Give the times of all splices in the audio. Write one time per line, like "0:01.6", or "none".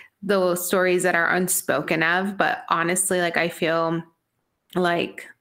none